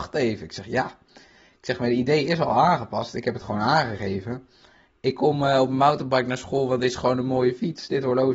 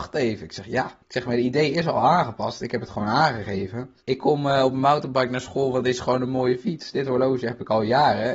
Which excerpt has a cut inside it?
second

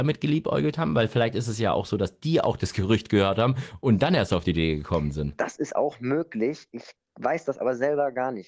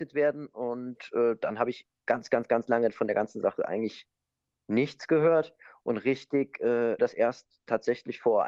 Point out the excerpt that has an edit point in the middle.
second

